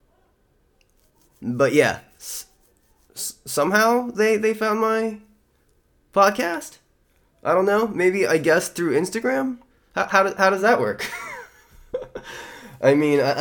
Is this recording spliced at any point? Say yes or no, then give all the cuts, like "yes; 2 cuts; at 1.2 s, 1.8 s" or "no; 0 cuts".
no; 0 cuts